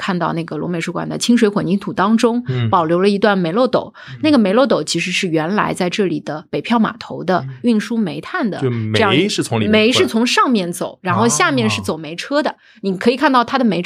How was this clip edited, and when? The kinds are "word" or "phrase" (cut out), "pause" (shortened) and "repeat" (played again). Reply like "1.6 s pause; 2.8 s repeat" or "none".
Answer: none